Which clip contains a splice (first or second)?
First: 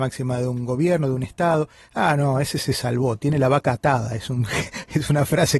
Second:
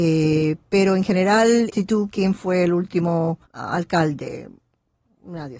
second